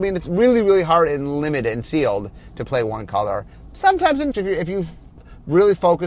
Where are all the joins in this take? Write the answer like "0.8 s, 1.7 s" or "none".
4.3 s